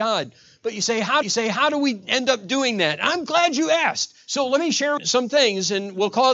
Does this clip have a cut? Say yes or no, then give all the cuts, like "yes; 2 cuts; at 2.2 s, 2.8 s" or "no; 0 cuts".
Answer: yes; 2 cuts; at 1.2 s, 5.0 s